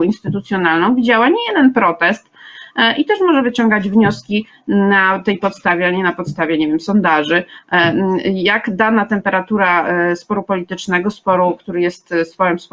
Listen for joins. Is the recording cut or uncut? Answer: uncut